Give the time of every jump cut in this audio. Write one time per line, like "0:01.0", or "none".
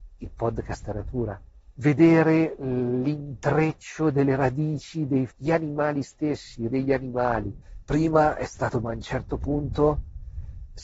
0:00.9
0:05.3
0:06.7
0:08.8